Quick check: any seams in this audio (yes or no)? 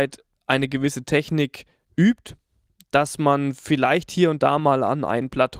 no